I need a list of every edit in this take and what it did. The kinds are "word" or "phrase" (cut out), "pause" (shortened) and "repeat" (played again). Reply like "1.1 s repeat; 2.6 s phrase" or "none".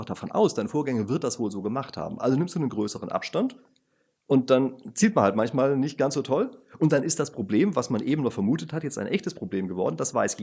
none